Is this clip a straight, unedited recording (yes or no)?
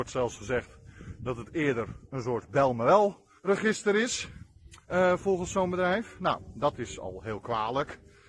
no